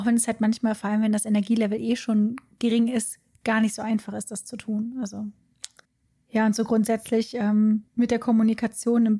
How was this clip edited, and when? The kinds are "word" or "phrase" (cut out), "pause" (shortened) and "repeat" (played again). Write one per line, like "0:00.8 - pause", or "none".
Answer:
0:05.8 - pause
0:07.9 - pause

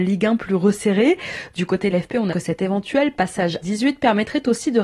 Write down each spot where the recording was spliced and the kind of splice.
0:01.9 - word
0:02.3 - word
0:03.6 - word

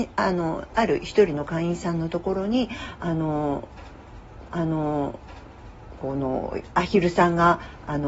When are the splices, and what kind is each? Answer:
0:04.5 - repeat

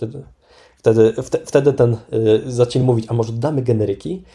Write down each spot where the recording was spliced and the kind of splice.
none

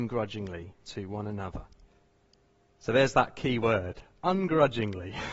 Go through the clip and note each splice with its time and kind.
0:01.9 - pause

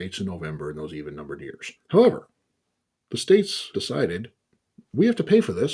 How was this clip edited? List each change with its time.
0:01.8 - pause
0:03.7 - word

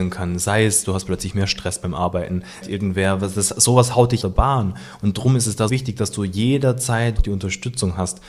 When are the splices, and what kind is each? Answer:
0:02.6 - phrase
0:04.2 - word
0:05.7 - word
0:07.2 - phrase

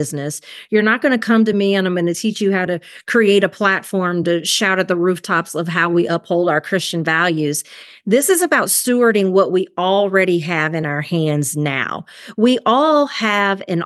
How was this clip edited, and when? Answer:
none

